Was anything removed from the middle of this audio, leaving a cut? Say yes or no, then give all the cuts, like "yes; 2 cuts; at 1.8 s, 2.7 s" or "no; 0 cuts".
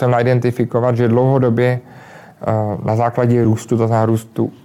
no; 0 cuts